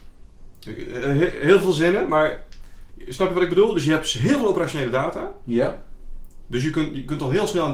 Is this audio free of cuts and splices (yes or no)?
yes